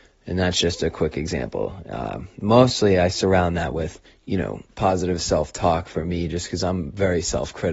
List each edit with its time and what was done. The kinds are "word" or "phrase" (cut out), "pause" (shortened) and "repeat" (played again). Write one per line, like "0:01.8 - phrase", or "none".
0:04.1 - pause
0:04.7 - pause